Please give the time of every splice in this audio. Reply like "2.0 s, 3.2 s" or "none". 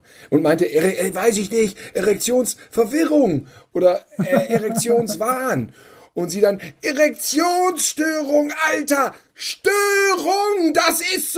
none